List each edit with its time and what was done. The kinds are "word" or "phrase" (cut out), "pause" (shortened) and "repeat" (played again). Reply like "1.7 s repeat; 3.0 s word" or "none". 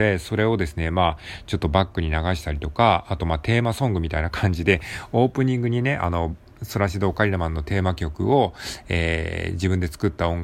none